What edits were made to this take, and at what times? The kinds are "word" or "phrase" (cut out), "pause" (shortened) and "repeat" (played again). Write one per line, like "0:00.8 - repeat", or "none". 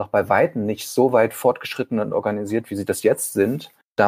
none